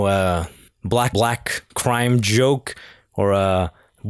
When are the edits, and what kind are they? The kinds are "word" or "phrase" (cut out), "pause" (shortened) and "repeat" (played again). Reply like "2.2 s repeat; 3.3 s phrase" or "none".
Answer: 1.1 s word; 1.7 s pause